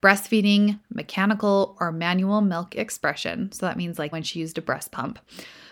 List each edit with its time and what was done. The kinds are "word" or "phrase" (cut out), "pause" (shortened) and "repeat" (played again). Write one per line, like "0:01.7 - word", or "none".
0:04.1 - word